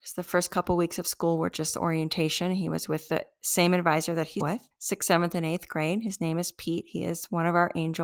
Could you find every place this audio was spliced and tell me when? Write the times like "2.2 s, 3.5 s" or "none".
4.4 s, 4.7 s